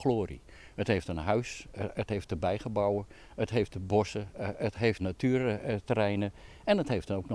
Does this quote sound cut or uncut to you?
cut